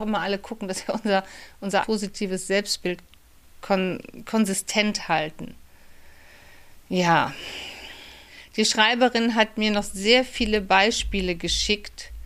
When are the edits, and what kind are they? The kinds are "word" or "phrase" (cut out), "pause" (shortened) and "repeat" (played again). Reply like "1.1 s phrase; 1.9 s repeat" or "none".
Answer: 1.8 s word; 3.6 s word

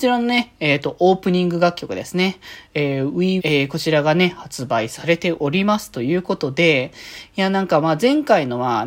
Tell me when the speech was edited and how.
3.4 s word

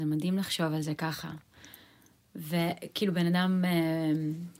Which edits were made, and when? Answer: none

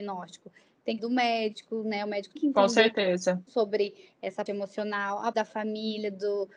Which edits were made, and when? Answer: 1.0 s phrase; 2.4 s word; 3.5 s word; 4.5 s word; 5.3 s word

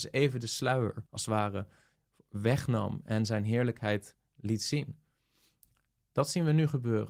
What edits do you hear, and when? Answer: 1.1 s pause

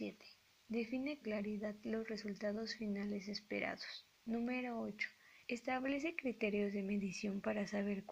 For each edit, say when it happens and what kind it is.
1.2 s word; 4.1 s pause; 5.4 s pause

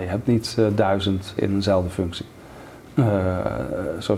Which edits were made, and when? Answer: 1.4 s word

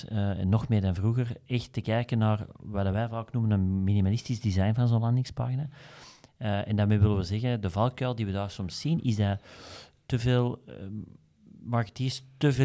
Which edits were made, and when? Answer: none

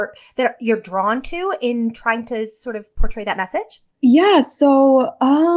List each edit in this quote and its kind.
3.9 s pause

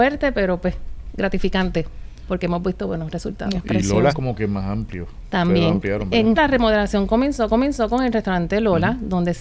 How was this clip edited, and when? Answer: 4.1 s word; 6.4 s word; 7.5 s repeat

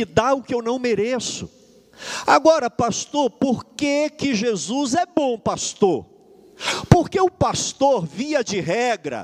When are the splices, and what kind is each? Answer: none

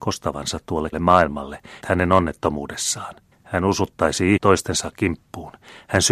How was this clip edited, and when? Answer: 0.9 s phrase; 1.8 s phrase; 3.3 s pause; 4.4 s word

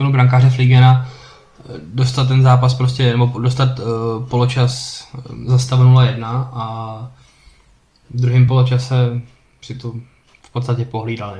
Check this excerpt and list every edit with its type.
none

